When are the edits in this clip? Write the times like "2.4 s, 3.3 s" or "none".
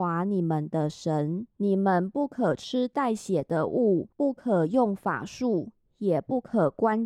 1.5 s, 4.1 s